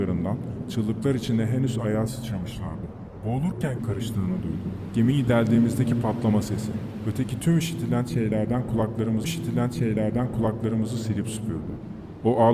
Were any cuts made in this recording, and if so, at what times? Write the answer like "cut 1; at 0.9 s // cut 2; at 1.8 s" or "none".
cut 1; at 3.8 s // cut 2; at 9.2 s